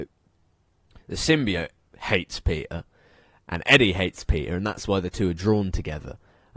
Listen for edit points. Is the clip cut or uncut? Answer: uncut